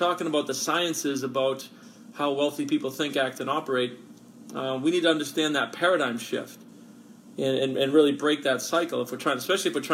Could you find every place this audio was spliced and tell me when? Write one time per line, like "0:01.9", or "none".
none